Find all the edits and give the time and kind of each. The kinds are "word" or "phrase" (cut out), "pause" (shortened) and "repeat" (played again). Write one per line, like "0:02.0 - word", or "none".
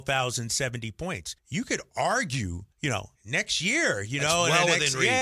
0:01.4 - pause
0:02.7 - pause
0:03.1 - pause

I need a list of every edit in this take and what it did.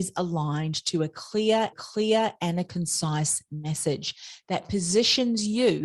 0:01.7 - repeat

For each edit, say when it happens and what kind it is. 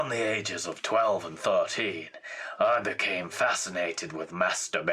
none

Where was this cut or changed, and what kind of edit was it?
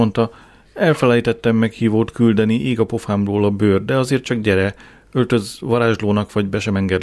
none

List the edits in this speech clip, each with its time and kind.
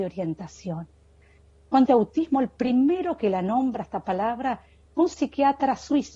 0:01.9 - word

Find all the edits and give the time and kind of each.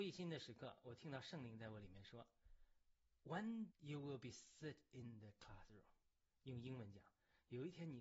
0:03.7 - word

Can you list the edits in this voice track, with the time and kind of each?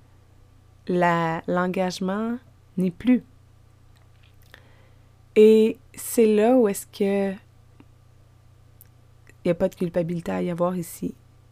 0:02.6 - pause
0:05.9 - pause

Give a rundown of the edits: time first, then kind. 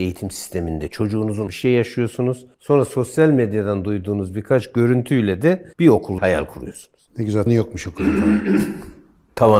0:01.5 - word
0:02.5 - pause
0:05.7 - pause
0:06.2 - word
0:07.5 - word

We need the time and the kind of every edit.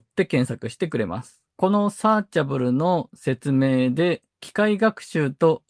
0:01.5 - pause
0:04.3 - pause

